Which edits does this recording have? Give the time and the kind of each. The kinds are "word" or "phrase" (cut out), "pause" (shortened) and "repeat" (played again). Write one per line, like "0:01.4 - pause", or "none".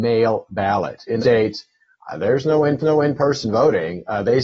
0:01.2 - word
0:02.8 - repeat